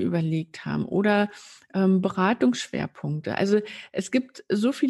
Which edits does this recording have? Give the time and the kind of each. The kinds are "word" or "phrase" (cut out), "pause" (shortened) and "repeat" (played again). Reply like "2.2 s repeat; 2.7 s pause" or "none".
none